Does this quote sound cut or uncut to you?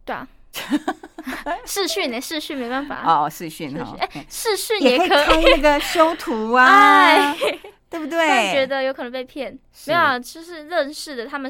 uncut